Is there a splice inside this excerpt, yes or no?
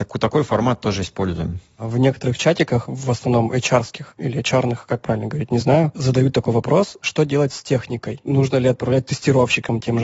no